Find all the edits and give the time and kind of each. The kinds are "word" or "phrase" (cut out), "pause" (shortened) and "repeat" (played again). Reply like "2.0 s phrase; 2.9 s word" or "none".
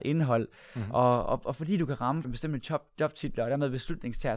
2.2 s word